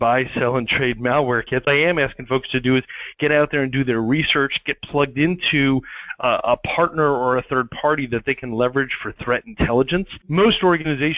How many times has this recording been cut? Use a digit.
1